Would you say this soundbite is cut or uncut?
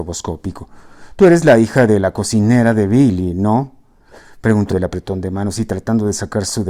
cut